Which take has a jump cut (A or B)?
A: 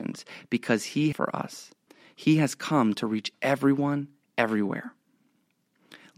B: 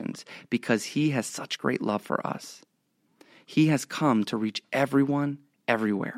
A